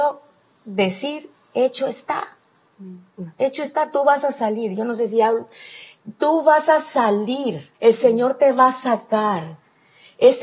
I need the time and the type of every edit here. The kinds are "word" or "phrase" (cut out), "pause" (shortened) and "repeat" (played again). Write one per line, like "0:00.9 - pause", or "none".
0:07.7 - pause

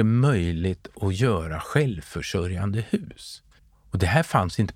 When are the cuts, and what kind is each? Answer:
0:03.6 - pause

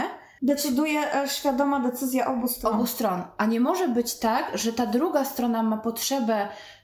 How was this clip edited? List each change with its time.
none

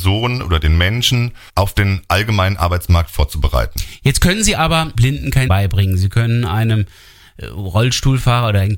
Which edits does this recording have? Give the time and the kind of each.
0:01.5 - word
0:04.9 - word
0:05.5 - word

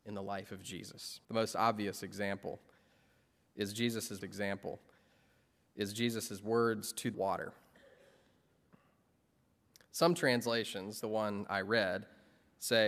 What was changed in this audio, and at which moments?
0:01.2 - pause
0:04.2 - repeat
0:07.1 - phrase
0:11.0 - word

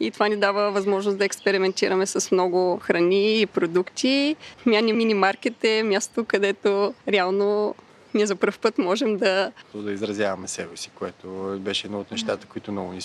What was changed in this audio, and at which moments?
0:07.0 - pause

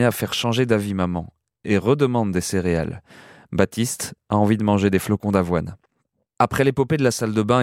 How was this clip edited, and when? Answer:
none

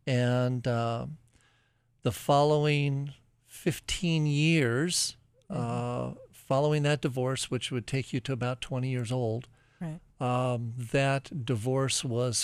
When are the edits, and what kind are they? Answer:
none

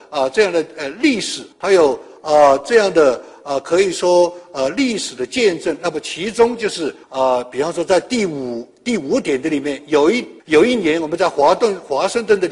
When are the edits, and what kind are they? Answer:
0:01.5 - pause
0:07.0 - pause
0:10.4 - pause

